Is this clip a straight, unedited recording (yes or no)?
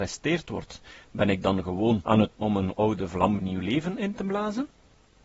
no